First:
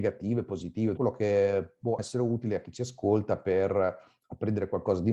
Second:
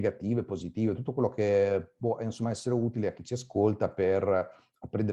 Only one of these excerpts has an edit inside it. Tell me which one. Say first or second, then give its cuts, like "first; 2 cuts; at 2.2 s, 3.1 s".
first; 2 cuts; at 1.0 s, 2.0 s